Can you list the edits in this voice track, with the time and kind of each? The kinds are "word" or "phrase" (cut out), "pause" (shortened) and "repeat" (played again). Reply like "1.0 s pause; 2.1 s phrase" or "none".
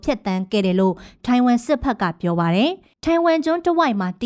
2.9 s pause